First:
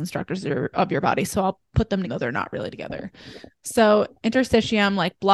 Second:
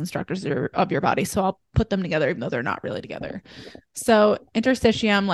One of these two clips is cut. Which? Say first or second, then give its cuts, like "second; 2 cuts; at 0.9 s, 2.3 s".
first; 1 cut; at 2.0 s